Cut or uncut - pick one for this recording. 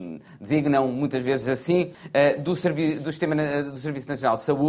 cut